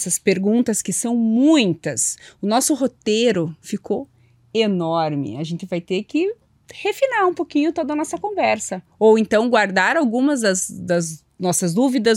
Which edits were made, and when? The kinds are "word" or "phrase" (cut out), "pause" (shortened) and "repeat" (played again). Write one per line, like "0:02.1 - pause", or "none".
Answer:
none